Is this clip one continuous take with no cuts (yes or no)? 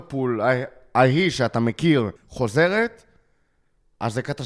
no